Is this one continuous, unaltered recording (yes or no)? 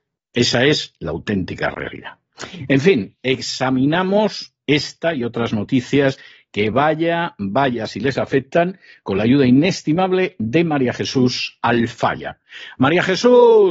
yes